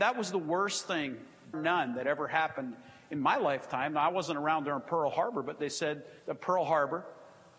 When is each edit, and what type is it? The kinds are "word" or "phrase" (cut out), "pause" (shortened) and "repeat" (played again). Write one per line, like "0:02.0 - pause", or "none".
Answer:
0:01.5 - word
0:06.2 - pause

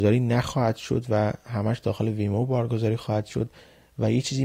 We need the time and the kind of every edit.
none

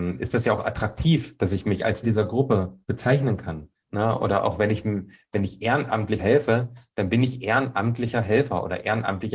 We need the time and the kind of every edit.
0:02.0 - word
0:02.8 - pause
0:03.8 - pause
0:06.2 - word

